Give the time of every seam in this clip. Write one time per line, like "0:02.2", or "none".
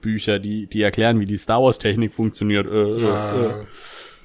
none